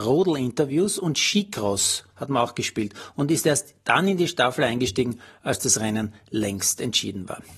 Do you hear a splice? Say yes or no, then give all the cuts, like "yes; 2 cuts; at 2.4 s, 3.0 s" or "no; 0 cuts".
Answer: no; 0 cuts